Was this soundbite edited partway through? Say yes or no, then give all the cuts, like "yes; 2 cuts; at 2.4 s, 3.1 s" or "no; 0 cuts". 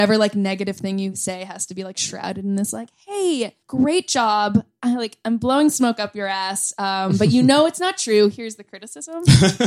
yes; 1 cut; at 3.6 s